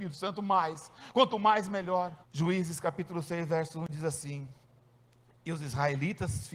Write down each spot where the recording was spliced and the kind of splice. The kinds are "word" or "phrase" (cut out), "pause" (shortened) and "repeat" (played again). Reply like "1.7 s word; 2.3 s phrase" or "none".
2.2 s pause